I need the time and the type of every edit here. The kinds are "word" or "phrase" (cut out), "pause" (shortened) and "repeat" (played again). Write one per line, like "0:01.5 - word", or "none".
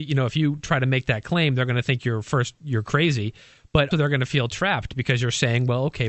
0:03.9 - word